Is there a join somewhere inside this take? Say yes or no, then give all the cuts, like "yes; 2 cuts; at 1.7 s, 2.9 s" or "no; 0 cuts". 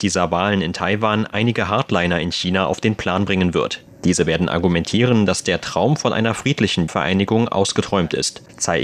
no; 0 cuts